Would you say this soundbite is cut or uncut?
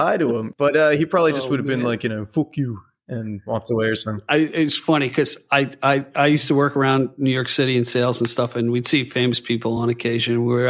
uncut